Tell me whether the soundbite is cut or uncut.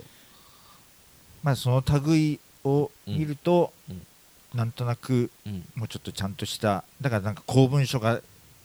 uncut